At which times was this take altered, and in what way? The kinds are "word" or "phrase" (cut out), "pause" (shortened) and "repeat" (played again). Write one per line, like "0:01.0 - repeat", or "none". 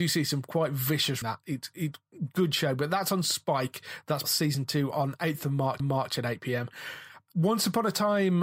0:01.2 - word
0:04.2 - word
0:05.8 - repeat